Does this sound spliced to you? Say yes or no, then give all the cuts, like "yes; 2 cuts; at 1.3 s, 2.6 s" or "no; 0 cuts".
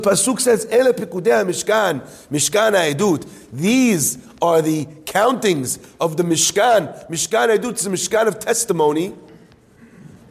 no; 0 cuts